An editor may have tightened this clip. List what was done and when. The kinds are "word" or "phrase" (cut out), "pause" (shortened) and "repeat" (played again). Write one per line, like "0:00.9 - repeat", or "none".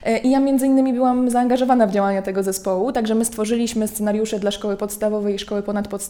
none